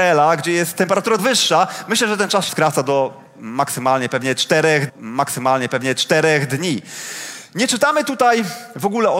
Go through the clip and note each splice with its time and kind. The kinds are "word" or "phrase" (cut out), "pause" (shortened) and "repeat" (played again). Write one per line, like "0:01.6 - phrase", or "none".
0:01.2 - word
0:02.5 - phrase
0:04.9 - repeat